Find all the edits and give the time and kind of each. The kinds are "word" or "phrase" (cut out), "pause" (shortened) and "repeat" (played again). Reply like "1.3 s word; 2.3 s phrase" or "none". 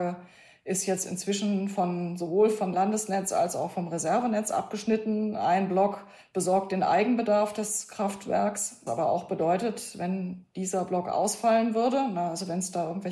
2.7 s word; 6.2 s pause; 8.9 s word